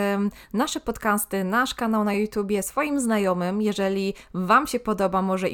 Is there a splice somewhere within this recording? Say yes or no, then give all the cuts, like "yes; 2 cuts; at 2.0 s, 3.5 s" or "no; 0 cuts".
no; 0 cuts